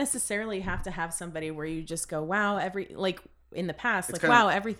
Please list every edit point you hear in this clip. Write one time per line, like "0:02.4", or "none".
none